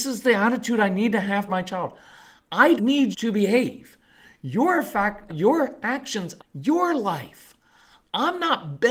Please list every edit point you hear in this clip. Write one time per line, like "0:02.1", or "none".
0:01.5
0:02.8
0:03.1
0:05.3
0:06.4